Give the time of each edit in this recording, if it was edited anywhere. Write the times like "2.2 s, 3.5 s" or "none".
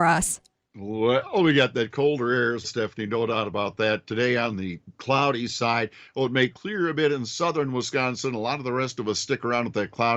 2.6 s